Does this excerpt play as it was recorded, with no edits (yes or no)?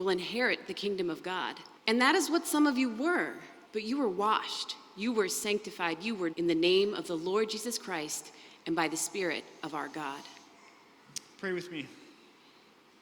no